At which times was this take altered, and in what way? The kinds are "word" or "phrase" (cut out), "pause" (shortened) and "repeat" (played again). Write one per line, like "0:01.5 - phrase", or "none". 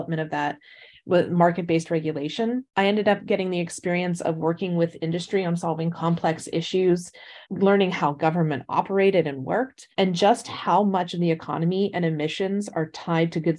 0:02.7 - pause
0:07.4 - pause
0:09.9 - pause